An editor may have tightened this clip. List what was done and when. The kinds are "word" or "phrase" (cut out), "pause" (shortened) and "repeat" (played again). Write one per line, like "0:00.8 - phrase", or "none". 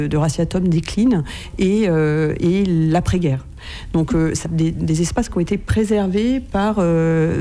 0:04.4 - phrase

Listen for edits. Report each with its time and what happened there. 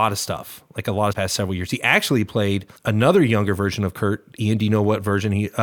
0:01.1 - phrase
0:02.8 - pause

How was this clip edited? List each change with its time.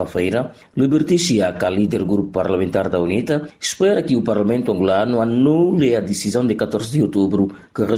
none

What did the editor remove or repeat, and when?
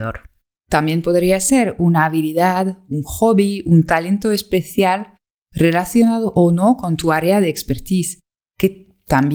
none

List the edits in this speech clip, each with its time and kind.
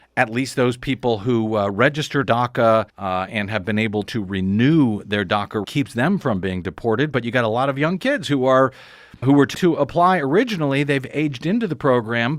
0:02.2 - word
0:02.9 - pause
0:04.0 - word
0:05.6 - word
0:09.2 - word
0:09.5 - word

